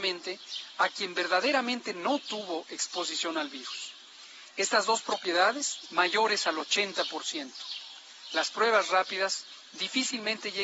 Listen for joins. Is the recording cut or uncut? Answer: cut